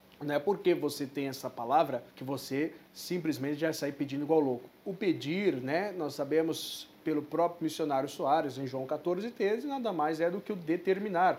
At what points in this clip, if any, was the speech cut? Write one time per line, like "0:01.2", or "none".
0:02.1